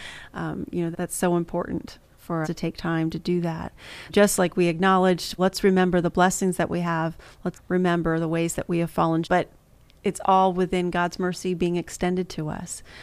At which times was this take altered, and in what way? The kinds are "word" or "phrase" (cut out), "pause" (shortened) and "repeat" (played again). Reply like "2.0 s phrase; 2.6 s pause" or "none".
0.9 s word; 2.4 s word; 4.1 s word; 5.4 s word; 7.5 s word; 9.2 s word